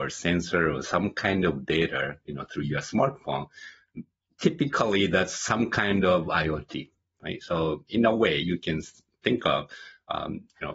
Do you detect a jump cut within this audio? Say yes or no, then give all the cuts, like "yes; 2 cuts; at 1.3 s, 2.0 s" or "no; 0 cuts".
no; 0 cuts